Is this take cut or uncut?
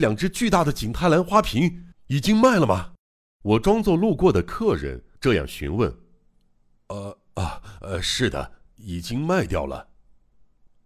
cut